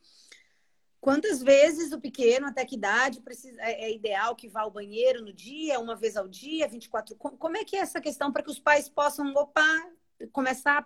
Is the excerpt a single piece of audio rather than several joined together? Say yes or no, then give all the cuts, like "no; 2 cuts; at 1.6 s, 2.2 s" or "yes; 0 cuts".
yes; 0 cuts